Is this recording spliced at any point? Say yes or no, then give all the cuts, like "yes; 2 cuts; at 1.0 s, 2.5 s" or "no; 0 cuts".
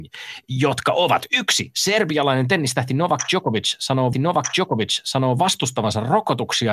yes; 1 cut; at 4.1 s